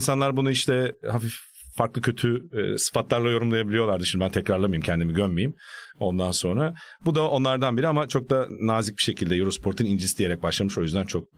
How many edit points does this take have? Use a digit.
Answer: 0